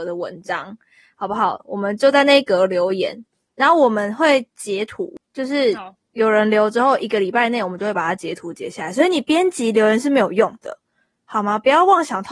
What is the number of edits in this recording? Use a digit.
0